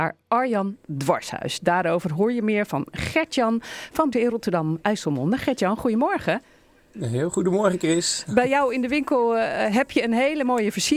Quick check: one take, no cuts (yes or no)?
no